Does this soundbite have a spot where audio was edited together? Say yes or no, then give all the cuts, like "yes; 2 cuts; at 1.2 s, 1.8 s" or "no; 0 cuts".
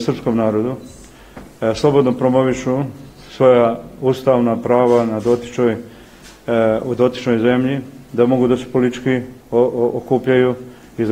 yes; 1 cut; at 9.4 s